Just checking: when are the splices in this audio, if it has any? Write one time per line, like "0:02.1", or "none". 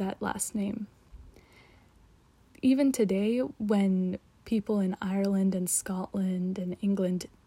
none